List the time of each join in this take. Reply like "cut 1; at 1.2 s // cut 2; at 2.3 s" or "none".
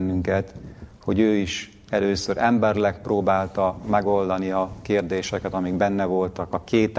none